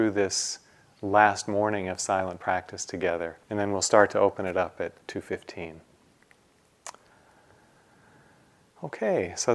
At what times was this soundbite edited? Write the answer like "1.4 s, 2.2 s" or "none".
3.4 s, 5.0 s

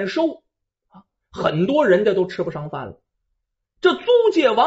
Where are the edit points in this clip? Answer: none

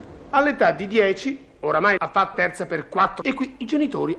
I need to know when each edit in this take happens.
2.0 s, 2.3 s, 3.2 s

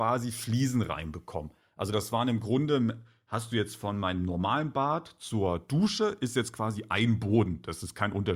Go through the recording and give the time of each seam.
none

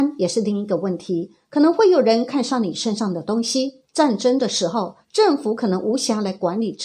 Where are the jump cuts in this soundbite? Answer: 3.8 s

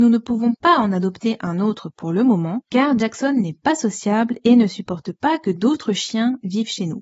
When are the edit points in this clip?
none

